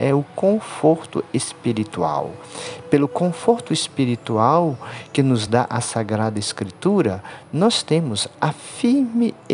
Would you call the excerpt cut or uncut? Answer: uncut